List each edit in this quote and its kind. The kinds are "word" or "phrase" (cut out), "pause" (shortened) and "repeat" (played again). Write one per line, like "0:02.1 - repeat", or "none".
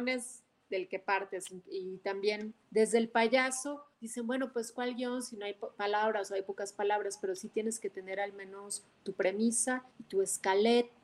0:02.6 - pause
0:03.9 - pause
0:09.9 - pause